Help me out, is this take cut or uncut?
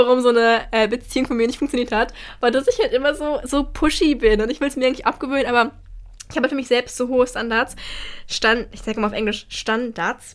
uncut